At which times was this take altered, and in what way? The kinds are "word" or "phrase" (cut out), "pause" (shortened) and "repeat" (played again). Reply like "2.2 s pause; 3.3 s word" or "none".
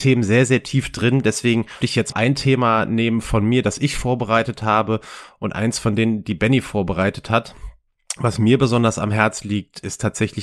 1.8 s word; 2.1 s word

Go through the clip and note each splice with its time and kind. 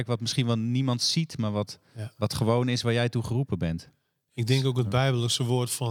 none

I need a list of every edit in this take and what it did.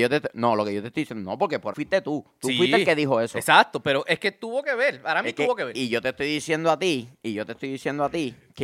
1.7 s word

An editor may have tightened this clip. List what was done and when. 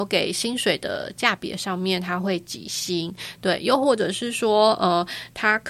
none

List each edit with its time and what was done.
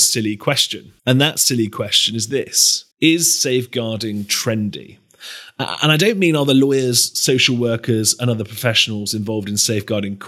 1.0 s pause; 2.9 s pause

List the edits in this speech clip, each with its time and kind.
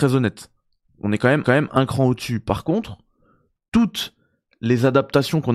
1.4 s repeat

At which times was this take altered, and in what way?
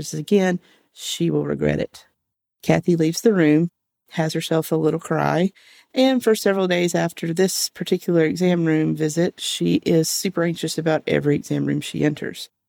none

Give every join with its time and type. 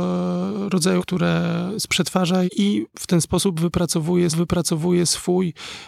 1.0 s word; 1.9 s word; 2.5 s word; 4.3 s repeat

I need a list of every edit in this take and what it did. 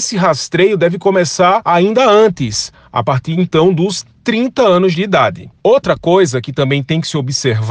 none

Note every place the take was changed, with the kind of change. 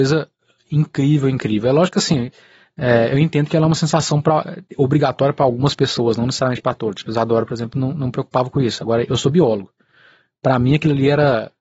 4.7 s pause

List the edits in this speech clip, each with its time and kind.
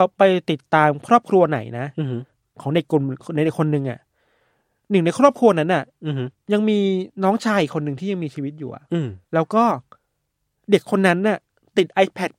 9.2 s pause

